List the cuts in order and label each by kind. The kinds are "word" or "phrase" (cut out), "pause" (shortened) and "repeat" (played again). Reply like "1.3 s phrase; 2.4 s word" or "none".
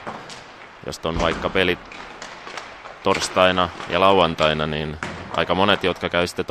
0.9 s word